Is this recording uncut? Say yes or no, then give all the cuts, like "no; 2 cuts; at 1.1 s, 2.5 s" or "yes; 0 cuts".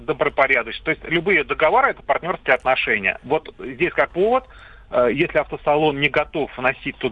no; 1 cut; at 4.1 s